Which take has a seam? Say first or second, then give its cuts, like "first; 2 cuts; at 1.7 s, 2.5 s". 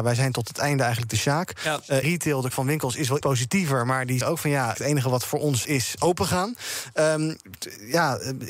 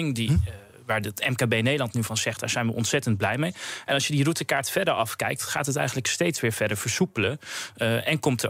first; 7 cuts; at 2.0 s, 2.5 s, 3.2 s, 4.2 s, 4.7 s, 5.6 s, 6.0 s